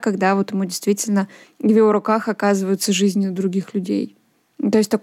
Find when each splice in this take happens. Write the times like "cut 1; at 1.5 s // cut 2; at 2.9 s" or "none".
cut 1; at 1.4 s